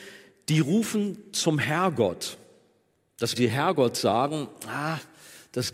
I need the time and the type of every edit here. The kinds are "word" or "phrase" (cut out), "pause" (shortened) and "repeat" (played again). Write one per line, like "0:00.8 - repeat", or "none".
0:03.4 - phrase